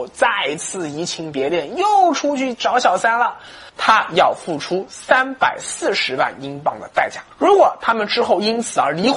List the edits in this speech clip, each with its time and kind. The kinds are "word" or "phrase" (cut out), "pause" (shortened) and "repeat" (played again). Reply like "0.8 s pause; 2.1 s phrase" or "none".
3.7 s pause; 7.3 s pause